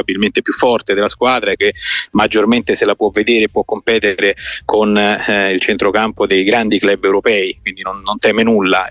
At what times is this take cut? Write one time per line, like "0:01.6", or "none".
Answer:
0:01.6